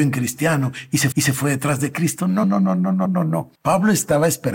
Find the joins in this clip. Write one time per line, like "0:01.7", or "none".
0:01.1
0:02.4
0:03.1
0:03.5